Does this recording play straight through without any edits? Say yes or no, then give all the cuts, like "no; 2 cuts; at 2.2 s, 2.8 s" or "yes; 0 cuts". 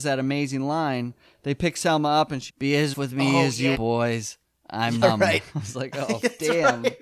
no; 4 cuts; at 2.5 s, 2.9 s, 3.7 s, 5.0 s